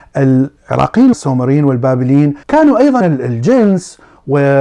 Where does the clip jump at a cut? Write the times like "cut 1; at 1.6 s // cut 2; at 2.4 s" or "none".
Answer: cut 1; at 1.1 s // cut 2; at 2.4 s // cut 3; at 3.0 s